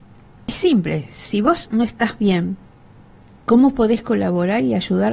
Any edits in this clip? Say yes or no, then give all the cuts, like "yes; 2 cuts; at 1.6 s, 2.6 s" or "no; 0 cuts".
no; 0 cuts